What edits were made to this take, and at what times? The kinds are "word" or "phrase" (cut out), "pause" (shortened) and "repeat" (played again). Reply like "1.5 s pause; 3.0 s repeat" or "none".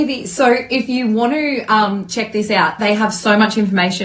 none